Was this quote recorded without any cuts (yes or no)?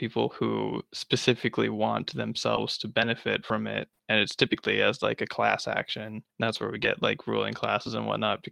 no